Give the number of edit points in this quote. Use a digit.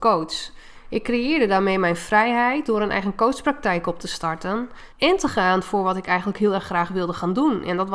1